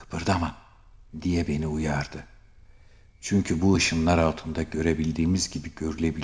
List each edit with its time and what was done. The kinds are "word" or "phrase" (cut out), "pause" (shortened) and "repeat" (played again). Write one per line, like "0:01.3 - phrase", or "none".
none